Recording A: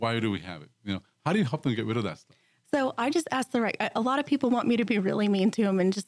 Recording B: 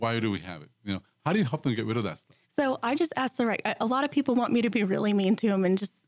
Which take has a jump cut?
B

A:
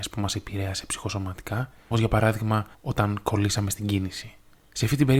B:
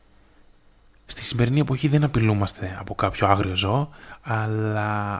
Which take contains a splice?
A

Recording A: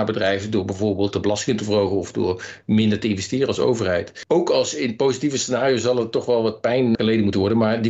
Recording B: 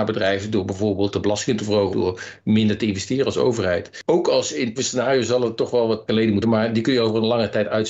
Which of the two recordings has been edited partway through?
B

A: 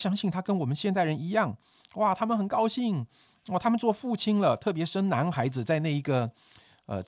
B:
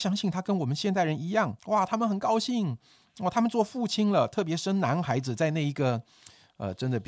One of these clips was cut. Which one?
B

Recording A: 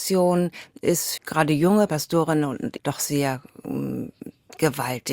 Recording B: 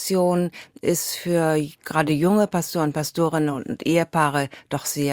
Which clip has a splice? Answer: A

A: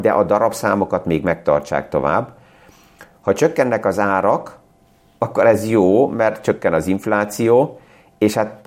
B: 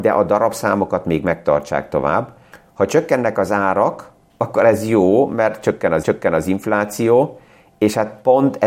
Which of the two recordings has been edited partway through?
B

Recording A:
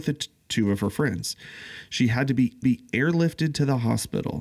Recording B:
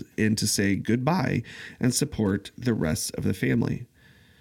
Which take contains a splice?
A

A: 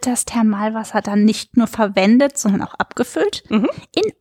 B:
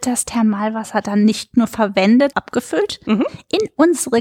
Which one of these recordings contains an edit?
B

